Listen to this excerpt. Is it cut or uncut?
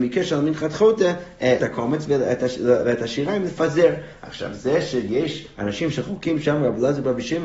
cut